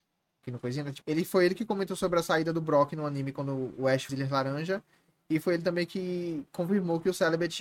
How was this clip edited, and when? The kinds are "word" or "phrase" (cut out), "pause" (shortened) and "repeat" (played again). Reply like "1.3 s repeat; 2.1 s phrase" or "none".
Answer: 1.0 s word; 4.1 s word